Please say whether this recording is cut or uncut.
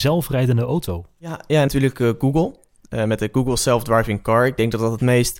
cut